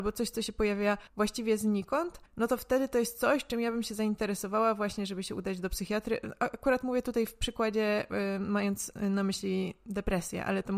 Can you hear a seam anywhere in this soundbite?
yes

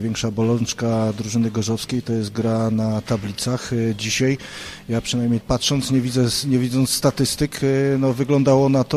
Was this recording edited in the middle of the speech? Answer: yes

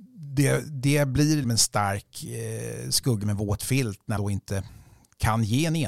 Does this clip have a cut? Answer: yes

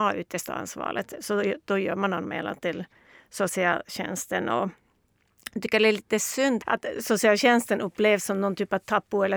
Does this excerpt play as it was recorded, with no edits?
yes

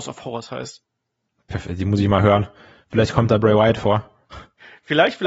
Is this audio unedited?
yes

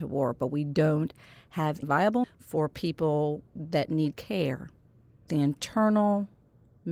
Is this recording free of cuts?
no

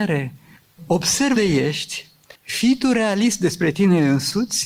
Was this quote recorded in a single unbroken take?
no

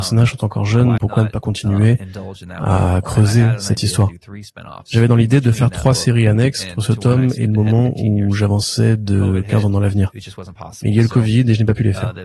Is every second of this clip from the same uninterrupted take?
no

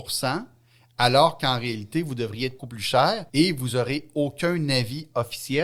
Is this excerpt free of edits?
no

